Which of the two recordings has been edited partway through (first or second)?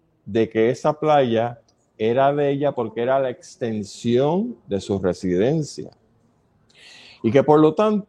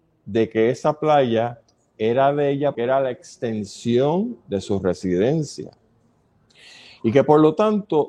second